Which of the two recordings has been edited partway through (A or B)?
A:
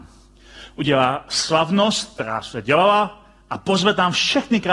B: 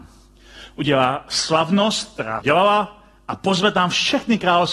B